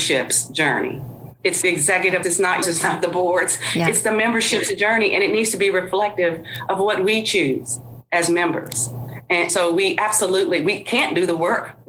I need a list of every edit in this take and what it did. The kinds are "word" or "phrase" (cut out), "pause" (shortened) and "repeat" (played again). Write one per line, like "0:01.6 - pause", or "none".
0:01.6 - word
0:02.2 - word
0:02.6 - word
0:09.5 - word